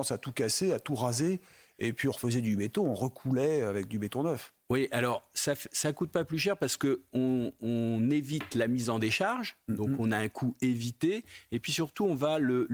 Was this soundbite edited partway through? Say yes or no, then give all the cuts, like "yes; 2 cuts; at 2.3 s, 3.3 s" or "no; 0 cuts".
no; 0 cuts